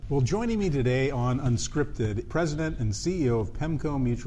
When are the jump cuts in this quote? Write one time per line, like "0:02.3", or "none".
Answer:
0:02.3